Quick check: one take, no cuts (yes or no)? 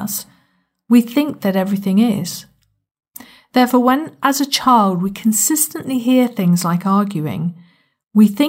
yes